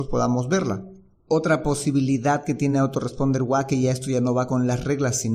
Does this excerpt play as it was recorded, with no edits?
yes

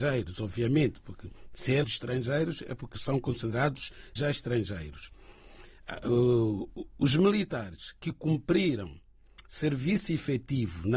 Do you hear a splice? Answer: yes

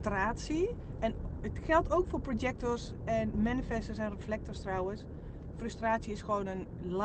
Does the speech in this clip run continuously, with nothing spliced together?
yes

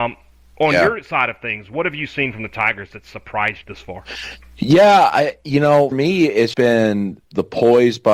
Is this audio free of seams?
no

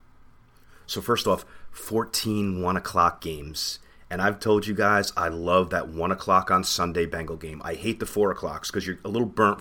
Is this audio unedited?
yes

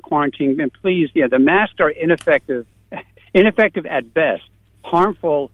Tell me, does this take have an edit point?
no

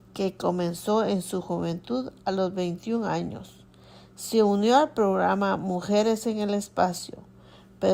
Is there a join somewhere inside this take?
no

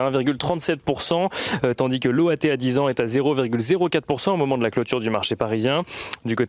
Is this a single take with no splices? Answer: yes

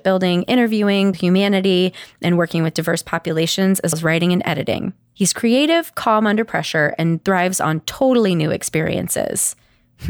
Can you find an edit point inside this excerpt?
yes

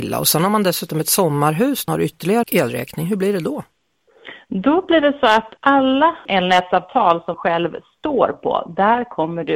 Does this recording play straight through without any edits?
no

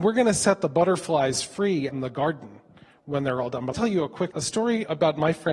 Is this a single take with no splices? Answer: no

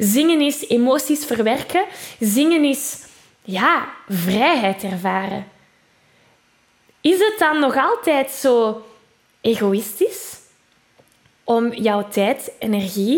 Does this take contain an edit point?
no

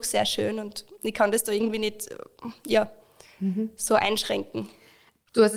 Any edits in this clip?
no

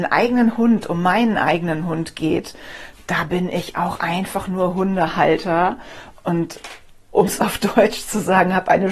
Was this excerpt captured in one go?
yes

